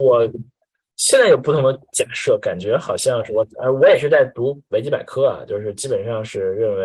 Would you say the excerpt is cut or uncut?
uncut